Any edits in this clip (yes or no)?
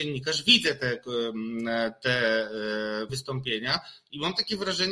yes